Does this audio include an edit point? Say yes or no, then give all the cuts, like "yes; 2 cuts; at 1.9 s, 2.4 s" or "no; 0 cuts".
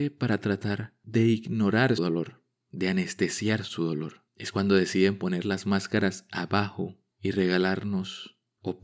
yes; 1 cut; at 2.0 s